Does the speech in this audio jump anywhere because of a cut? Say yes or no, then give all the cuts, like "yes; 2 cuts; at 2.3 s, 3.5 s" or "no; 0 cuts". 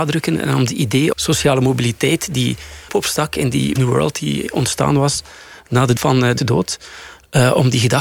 yes; 5 cuts; at 1.1 s, 2.9 s, 3.8 s, 6.0 s, 6.4 s